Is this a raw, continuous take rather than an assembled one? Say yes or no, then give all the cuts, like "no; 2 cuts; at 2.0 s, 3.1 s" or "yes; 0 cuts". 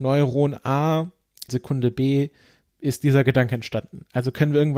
no; 1 cut; at 1.5 s